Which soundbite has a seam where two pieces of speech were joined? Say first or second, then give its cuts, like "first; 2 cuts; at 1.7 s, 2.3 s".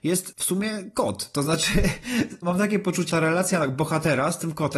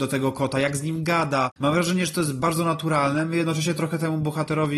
first; 2 cuts; at 2.4 s, 3.1 s